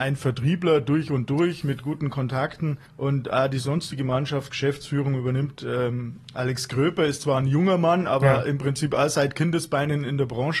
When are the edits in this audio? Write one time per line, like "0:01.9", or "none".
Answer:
0:02.9